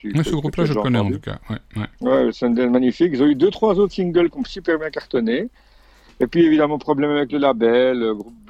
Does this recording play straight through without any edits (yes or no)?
yes